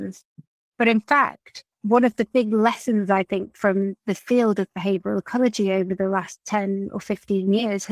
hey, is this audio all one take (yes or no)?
no